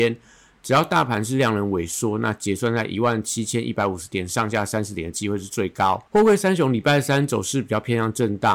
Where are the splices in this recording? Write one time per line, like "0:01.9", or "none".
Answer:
0:06.1